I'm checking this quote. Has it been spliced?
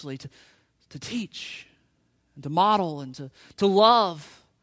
no; 0 cuts

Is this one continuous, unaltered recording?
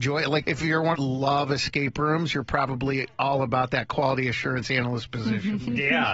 no; 1 cut; at 0.9 s

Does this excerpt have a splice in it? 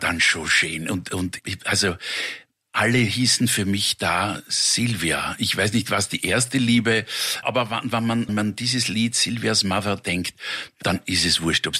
yes; 3 cuts; at 1.4 s, 7.4 s, 8.3 s

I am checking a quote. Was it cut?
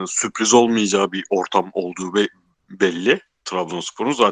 no; 0 cuts

